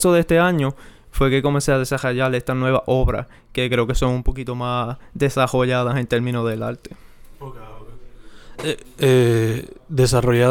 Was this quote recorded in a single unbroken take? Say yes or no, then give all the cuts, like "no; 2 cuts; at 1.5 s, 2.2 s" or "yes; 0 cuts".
yes; 0 cuts